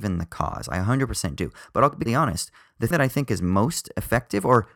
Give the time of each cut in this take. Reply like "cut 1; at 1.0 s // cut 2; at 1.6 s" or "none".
cut 1; at 2.1 s // cut 2; at 2.9 s